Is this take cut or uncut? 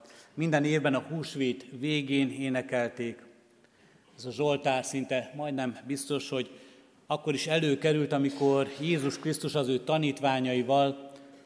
uncut